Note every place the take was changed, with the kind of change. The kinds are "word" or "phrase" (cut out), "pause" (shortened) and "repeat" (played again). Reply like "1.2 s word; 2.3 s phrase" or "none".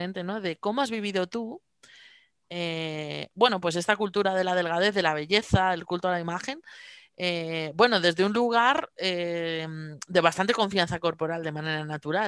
none